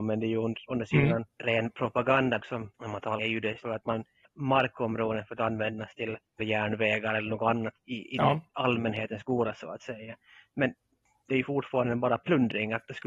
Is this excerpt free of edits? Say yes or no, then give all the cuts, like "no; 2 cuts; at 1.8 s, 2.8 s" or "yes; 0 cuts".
no; 8 cuts; at 1.3 s, 2.4 s, 2.7 s, 3.2 s, 3.6 s, 4.2 s, 6.4 s, 7.8 s